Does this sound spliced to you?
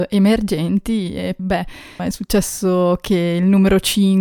yes; 2 cuts; at 1.4 s, 2.0 s

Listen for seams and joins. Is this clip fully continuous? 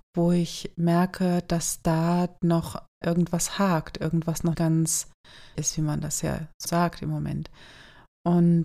no; 4 cuts; at 3.0 s, 4.5 s, 5.5 s, 6.6 s

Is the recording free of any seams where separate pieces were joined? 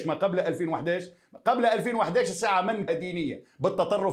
no; 1 cut; at 2.9 s

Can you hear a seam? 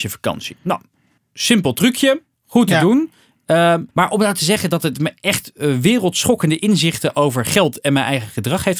yes; 2 cuts; at 1.2 s, 3.9 s

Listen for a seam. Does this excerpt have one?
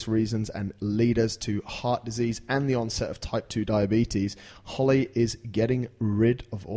no; 0 cuts

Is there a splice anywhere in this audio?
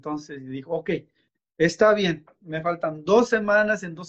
no; 0 cuts

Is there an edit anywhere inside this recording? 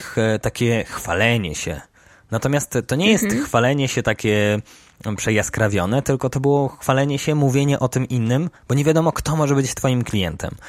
yes; 1 cut; at 8.6 s

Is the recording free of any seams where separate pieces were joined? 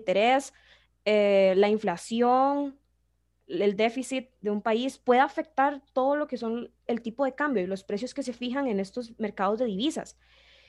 no; 1 cut; at 6.9 s

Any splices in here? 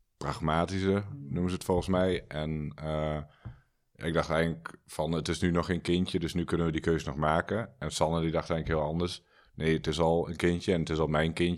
no; 0 cuts

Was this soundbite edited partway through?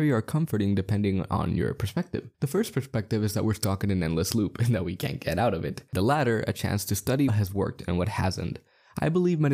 yes; 2 cuts; at 2.3 s, 7.3 s

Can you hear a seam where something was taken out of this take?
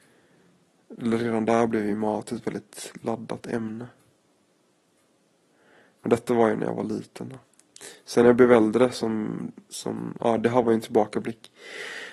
no; 0 cuts

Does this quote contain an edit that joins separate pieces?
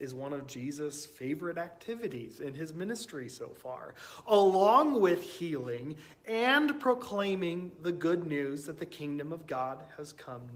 no; 0 cuts

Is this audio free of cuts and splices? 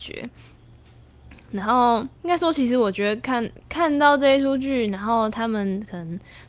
no; 1 cut; at 2.2 s

